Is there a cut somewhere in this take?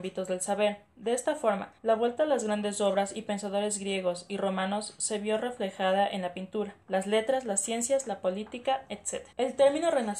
yes; 3 cuts; at 1.8 s, 6.8 s, 9.3 s

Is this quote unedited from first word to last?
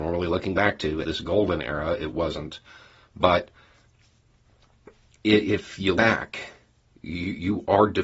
no; 2 cuts; at 1.0 s, 6.0 s

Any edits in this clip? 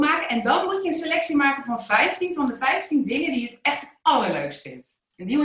no; 0 cuts

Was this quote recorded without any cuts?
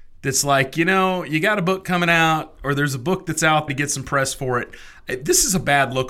no; 1 cut; at 3.7 s

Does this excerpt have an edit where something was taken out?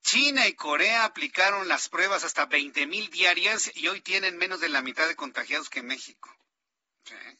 no; 0 cuts

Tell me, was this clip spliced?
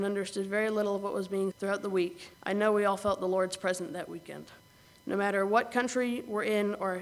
yes; 3 cuts; at 1.5 s, 2.3 s, 4.6 s

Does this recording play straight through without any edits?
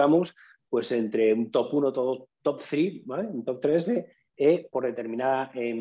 no; 2 cuts; at 2.3 s, 4.7 s

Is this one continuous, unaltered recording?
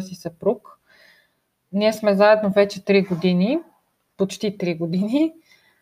yes; 0 cuts

